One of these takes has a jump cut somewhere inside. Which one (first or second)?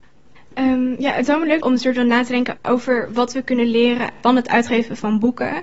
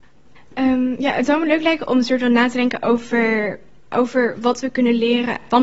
first